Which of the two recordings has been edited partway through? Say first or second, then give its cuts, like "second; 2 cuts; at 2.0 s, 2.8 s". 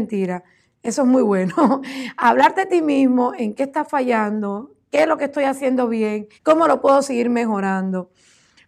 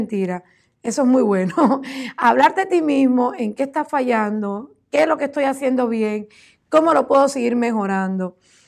first; 1 cut; at 6.3 s